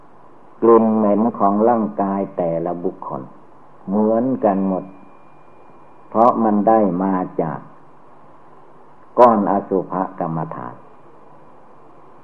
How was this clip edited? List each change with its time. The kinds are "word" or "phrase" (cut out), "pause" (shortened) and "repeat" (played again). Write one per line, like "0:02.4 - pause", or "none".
none